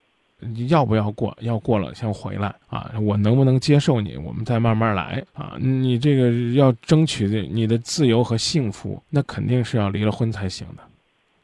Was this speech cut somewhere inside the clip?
yes; 2 cuts; at 2.6 s, 9.0 s

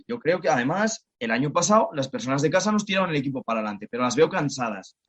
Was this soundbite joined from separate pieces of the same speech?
no; 0 cuts

